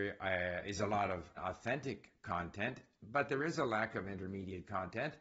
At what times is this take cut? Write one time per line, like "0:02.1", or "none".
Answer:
0:01.4